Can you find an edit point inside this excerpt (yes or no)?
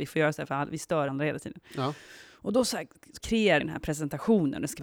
yes